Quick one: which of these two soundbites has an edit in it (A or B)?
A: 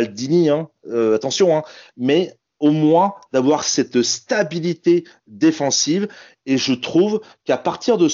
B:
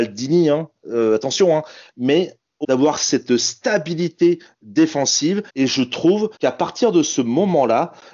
B